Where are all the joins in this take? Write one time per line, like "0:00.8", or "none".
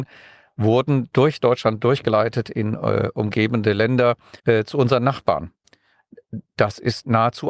0:04.4